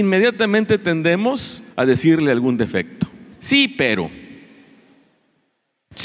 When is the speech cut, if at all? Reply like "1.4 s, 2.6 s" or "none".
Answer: 1.7 s, 3.3 s